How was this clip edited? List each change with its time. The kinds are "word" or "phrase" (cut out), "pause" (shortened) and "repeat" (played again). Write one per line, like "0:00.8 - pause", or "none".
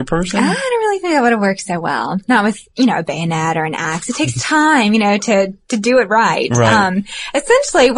none